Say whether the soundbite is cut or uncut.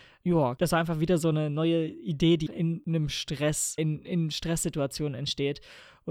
cut